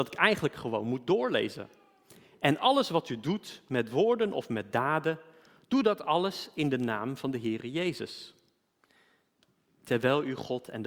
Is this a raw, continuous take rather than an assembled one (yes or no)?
yes